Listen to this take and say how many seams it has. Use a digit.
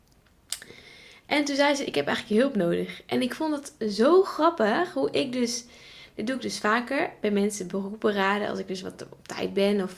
0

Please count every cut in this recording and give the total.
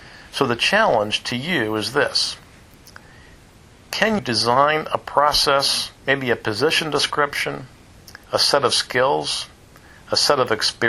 3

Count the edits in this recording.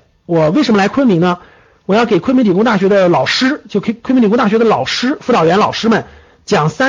0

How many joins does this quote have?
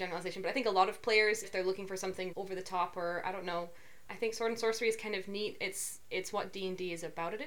3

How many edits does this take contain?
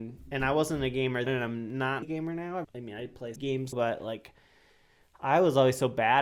5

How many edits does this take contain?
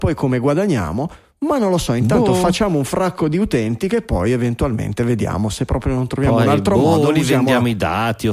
0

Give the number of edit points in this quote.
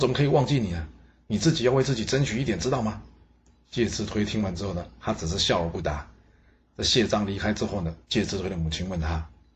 1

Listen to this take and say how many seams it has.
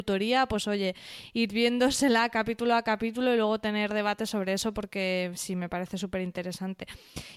0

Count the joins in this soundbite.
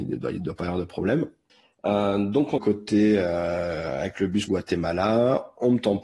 2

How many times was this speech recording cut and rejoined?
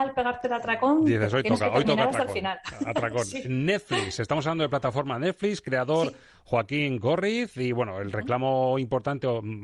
0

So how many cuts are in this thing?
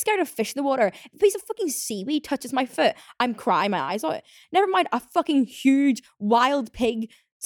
0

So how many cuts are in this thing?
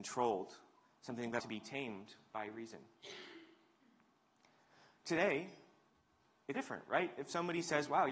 2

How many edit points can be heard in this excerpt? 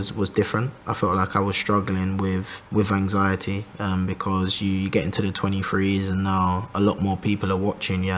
1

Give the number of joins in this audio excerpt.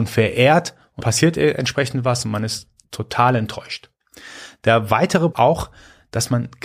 2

